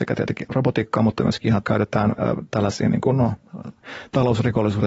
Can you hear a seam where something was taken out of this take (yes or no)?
yes